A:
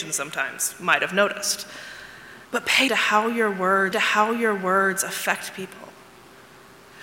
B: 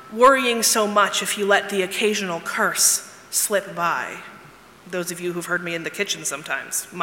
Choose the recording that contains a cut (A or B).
A